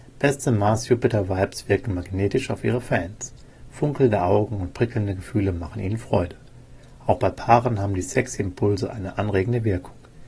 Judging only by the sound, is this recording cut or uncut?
uncut